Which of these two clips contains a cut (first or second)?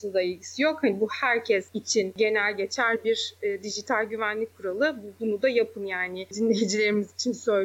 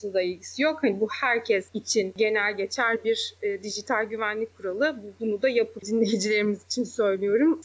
second